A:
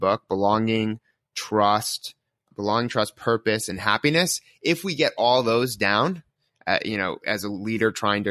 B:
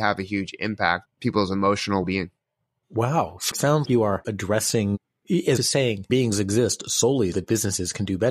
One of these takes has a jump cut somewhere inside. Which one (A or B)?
B